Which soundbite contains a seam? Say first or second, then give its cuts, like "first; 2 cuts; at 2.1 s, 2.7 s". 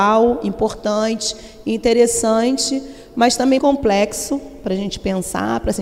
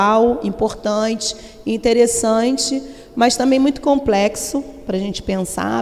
first; 1 cut; at 3.6 s